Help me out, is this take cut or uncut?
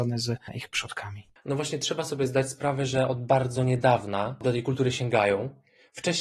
uncut